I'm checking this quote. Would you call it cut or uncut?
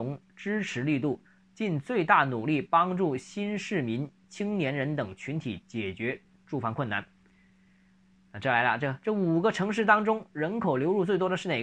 uncut